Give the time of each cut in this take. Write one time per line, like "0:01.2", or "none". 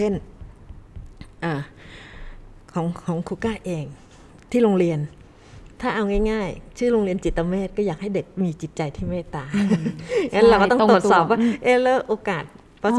none